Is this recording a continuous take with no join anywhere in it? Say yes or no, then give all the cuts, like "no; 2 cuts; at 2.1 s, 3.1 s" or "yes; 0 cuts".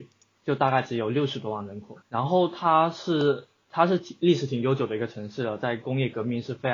no; 1 cut; at 2.0 s